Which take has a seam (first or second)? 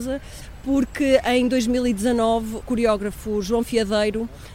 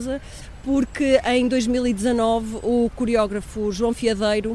first